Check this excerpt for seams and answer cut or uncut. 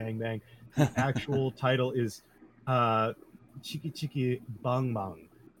uncut